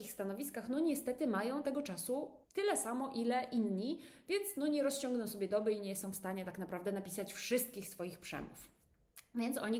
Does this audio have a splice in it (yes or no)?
yes